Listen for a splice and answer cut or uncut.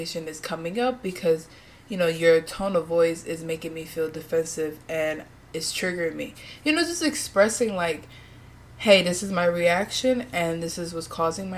uncut